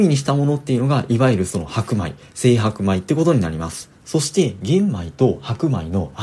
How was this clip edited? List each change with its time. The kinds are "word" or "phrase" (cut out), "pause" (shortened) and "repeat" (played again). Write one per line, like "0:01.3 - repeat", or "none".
0:04.0 - pause